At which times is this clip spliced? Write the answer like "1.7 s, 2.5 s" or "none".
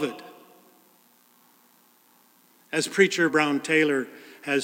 3.3 s

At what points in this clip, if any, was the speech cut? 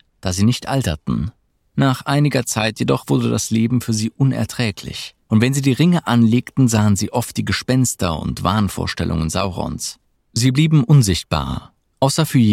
1.5 s, 5.2 s, 10.0 s

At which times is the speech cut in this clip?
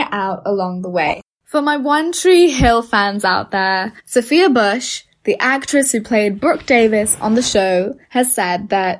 4.0 s, 8.0 s

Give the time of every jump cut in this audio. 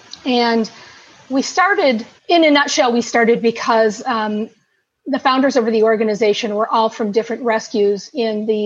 2.2 s

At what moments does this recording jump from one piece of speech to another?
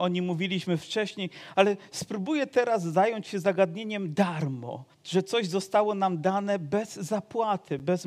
4.9 s

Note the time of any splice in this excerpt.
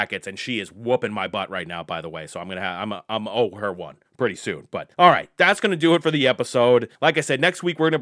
4.1 s, 4.9 s, 6.9 s

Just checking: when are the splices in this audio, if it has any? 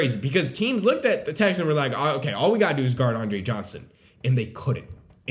none

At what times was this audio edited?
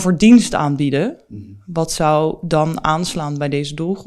none

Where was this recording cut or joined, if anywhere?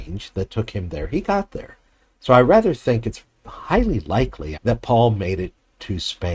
4.5 s

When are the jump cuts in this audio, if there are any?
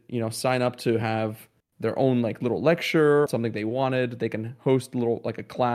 3.3 s

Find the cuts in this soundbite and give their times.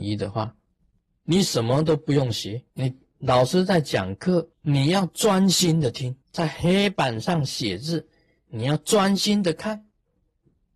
2.7 s, 4.5 s, 6.2 s

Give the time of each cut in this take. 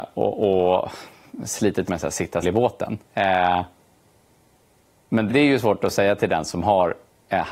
1.9 s, 2.4 s, 3.0 s, 5.3 s

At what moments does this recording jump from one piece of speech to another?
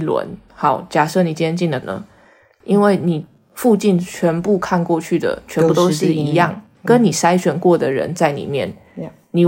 none

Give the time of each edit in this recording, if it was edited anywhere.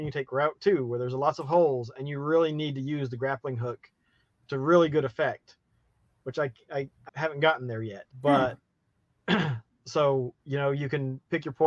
7.1 s, 8.1 s, 10.4 s

